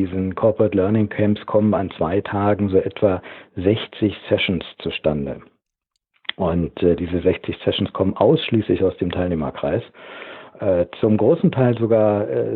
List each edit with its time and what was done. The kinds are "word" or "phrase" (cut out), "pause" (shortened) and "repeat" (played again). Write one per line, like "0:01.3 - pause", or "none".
none